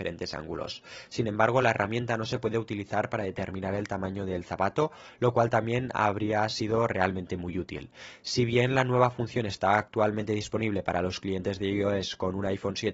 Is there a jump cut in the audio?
no; 0 cuts

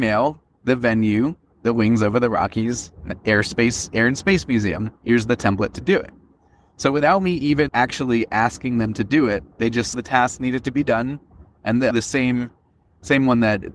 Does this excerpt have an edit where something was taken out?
yes; 5 cuts; at 5.0 s, 7.7 s, 9.5 s, 9.9 s, 11.9 s

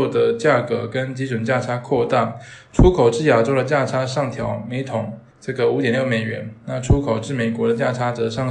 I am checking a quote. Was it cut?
yes; 1 cut; at 5.3 s

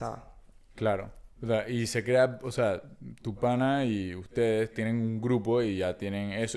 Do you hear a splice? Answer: yes; 1 cut; at 1.3 s

